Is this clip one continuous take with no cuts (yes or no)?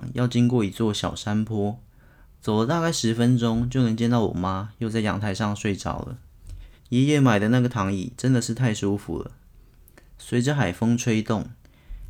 no